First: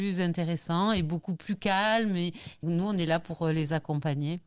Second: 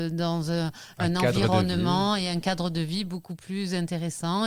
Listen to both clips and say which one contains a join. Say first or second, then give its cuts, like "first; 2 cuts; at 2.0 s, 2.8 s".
first; 1 cut; at 2.6 s